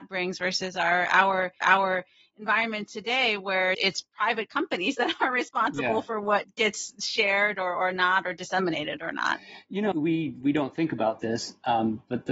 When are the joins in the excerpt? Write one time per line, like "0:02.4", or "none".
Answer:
0:01.6
0:03.7
0:09.9